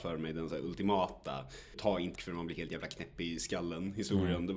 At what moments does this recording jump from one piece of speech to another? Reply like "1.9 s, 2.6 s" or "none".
1.7 s, 2.1 s